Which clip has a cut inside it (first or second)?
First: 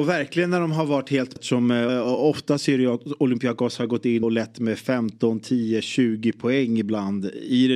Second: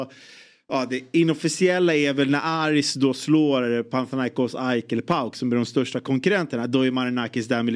first